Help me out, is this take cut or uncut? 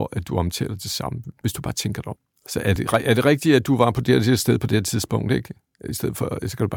uncut